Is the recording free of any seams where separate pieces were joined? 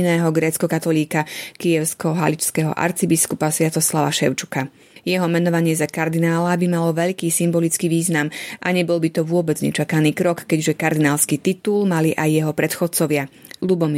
yes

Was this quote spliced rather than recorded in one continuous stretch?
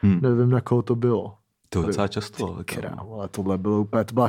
yes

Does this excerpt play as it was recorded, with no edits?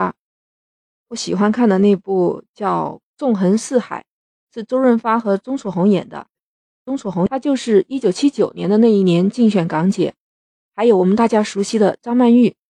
yes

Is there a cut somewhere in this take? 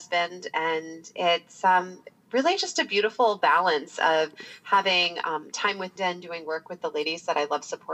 yes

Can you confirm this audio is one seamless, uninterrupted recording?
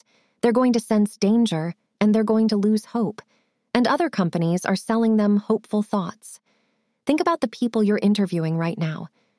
yes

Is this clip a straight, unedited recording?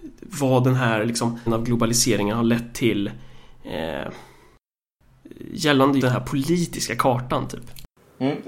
no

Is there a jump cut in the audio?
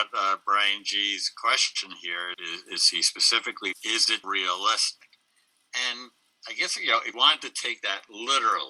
yes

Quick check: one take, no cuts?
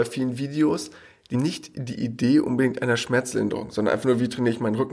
no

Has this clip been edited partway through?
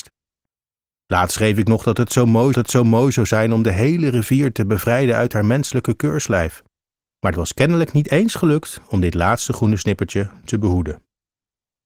yes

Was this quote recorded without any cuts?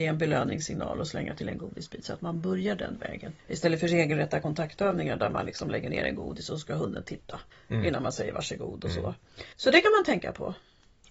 no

